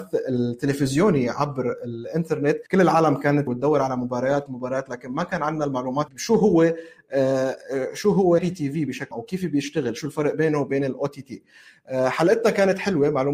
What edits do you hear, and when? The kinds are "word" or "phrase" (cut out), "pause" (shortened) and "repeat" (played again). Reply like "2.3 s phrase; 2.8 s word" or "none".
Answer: 2.7 s pause; 3.5 s word; 4.5 s word; 6.1 s phrase; 8.4 s word; 9.1 s word